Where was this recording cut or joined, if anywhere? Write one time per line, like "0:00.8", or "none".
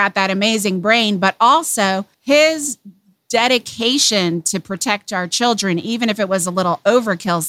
0:02.1